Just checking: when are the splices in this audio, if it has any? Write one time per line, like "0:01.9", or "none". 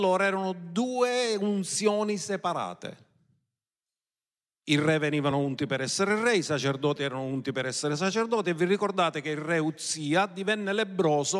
none